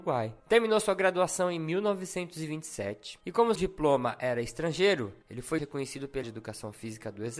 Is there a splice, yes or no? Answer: yes